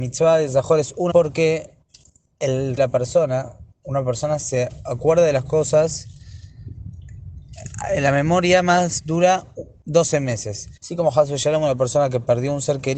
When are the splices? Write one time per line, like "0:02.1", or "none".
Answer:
0:01.1
0:02.8
0:03.7
0:10.8